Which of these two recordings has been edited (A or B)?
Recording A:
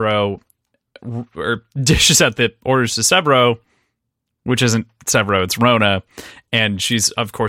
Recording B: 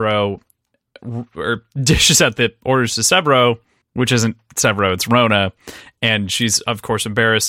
B